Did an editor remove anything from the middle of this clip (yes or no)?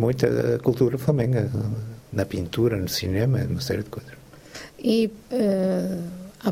no